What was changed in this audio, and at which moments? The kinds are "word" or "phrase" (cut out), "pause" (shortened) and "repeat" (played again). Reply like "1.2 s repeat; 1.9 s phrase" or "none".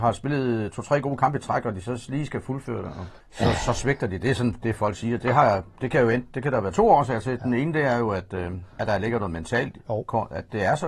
3.2 s pause; 8.7 s pause